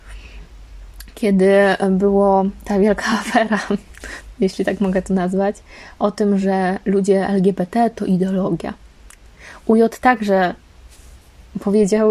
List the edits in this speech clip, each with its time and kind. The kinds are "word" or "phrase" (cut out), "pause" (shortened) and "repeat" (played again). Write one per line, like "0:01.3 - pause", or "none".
none